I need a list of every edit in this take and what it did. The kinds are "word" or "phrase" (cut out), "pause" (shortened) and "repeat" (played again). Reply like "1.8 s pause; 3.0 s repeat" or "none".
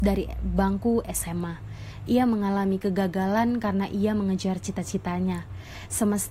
none